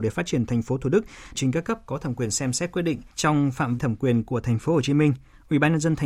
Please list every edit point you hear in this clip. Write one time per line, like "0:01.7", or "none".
0:01.3
0:03.1
0:03.8